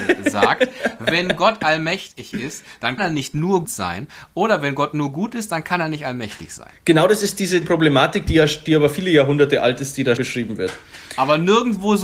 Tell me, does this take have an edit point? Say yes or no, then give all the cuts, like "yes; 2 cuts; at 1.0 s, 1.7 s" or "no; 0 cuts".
yes; 4 cuts; at 3.0 s, 3.6 s, 7.6 s, 10.2 s